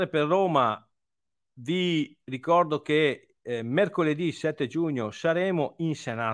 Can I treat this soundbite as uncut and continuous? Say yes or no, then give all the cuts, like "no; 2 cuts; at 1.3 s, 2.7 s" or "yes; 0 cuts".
yes; 0 cuts